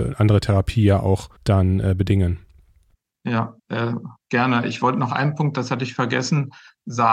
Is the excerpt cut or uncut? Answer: cut